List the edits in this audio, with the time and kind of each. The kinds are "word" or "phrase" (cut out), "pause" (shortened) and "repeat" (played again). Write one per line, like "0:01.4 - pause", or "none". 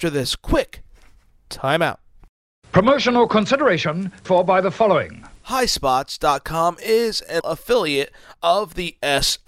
0:04.2 - word
0:07.4 - word